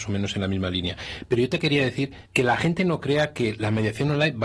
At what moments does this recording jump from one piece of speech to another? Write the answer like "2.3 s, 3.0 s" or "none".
2.3 s